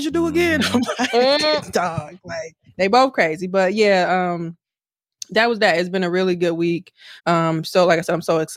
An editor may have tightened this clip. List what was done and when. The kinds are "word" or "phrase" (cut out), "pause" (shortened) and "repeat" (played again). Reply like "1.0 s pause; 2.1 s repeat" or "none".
2.7 s pause; 7.2 s pause